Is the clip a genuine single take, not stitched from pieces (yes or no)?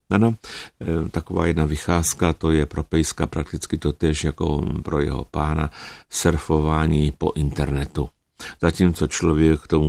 yes